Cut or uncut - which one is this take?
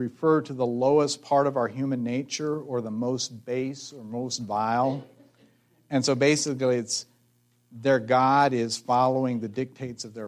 uncut